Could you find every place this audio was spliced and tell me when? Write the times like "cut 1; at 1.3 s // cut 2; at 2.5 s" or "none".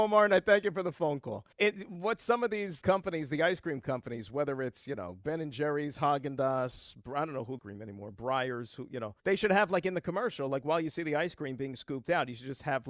cut 1; at 1.5 s // cut 2; at 2.8 s // cut 3; at 7.6 s // cut 4; at 9.2 s